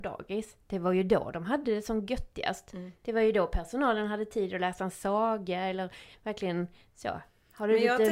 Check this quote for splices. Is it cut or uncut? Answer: uncut